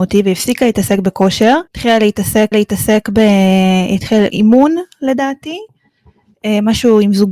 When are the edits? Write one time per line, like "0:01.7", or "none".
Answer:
0:01.7
0:02.5
0:04.3